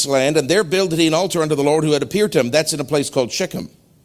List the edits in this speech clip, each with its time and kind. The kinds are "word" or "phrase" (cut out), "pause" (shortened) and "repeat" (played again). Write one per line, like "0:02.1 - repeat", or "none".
none